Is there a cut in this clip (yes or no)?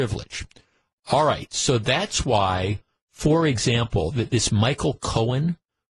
no